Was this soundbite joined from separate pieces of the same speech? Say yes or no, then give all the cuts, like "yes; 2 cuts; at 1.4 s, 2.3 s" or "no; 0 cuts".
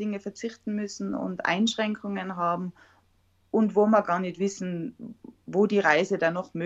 no; 0 cuts